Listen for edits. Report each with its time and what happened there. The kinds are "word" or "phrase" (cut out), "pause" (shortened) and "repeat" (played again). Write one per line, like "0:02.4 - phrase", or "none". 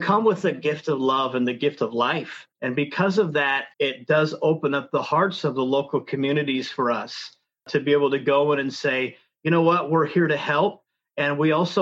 0:02.5 - pause
0:03.7 - pause

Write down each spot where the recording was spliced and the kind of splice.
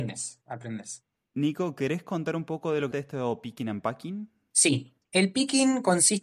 0:02.9 - phrase

